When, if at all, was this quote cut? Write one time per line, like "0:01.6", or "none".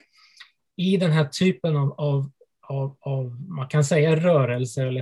none